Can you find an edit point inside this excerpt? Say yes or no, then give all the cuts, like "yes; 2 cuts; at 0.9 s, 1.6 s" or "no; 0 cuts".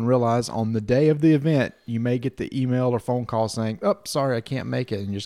no; 0 cuts